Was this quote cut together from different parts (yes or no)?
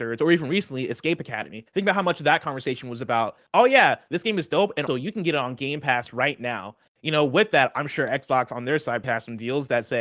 yes